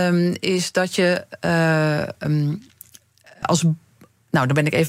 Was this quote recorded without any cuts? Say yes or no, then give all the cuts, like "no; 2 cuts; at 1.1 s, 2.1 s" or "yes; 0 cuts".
no; 2 cuts; at 2.2 s, 3.4 s